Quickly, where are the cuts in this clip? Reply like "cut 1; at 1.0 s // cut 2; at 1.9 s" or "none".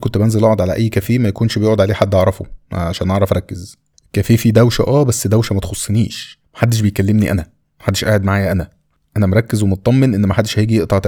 none